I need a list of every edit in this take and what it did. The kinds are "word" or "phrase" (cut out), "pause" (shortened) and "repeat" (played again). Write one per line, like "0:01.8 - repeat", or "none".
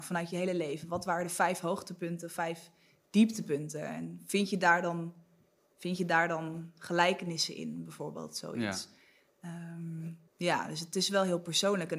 0:10.3 - pause